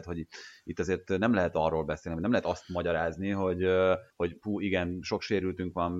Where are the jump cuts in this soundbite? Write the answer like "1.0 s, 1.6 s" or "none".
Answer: 4.1 s